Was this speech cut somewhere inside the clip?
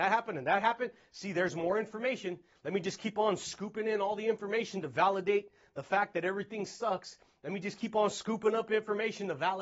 no; 0 cuts

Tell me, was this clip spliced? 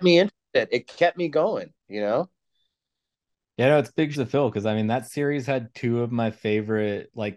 yes; 2 cuts; at 1.8 s, 4.1 s

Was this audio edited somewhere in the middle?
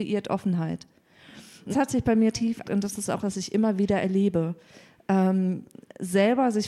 yes; 4 cuts; at 1.7 s, 2.3 s, 2.6 s, 3.2 s

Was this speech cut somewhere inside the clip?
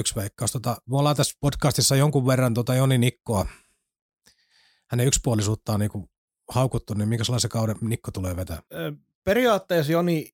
no; 0 cuts

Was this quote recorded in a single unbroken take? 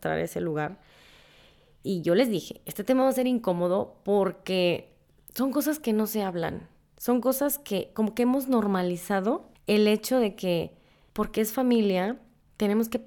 yes; 0 cuts

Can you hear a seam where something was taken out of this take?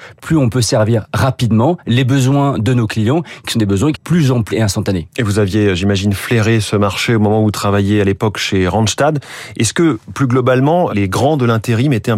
yes; 3 cuts; at 3.9 s, 4.5 s, 10.9 s

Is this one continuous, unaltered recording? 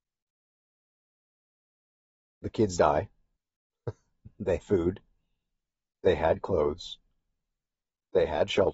no; 3 cuts; at 2.8 s, 3.4 s, 4.6 s

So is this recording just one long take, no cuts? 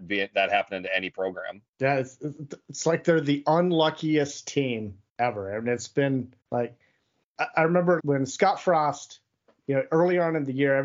no; 4 cuts; at 1.7 s, 5.1 s, 6.4 s, 8.0 s

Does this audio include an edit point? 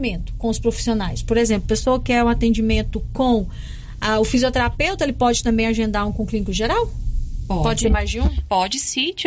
no; 0 cuts

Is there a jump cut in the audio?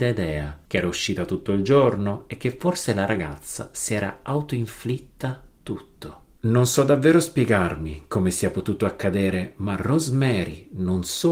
no; 0 cuts

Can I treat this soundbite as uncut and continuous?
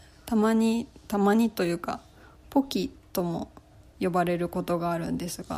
yes; 0 cuts

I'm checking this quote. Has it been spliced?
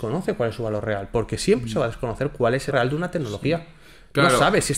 yes; 1 cut; at 2.7 s

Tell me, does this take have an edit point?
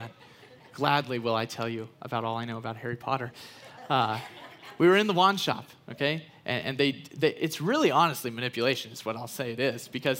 no; 0 cuts

